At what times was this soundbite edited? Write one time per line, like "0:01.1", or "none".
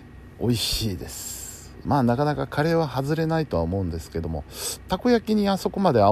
0:01.8